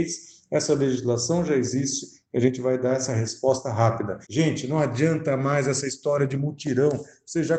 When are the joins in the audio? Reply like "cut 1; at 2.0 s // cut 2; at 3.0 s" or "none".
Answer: cut 1; at 4.2 s